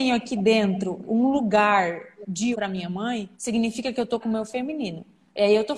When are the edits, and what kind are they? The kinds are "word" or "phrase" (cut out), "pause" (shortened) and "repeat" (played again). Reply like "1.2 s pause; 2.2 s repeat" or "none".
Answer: 1.0 s word; 2.5 s word; 3.3 s pause; 4.2 s word